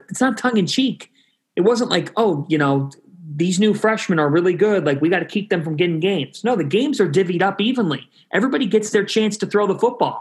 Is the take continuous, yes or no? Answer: yes